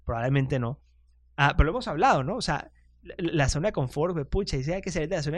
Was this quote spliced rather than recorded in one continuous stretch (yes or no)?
no